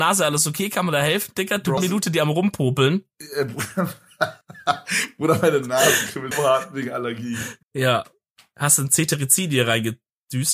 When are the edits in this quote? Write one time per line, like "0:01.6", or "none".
0:01.8
0:04.4
0:06.3
0:07.6